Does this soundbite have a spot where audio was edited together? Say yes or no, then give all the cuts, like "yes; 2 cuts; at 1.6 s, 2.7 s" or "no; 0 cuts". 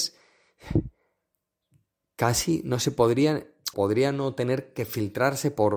yes; 1 cut; at 3.7 s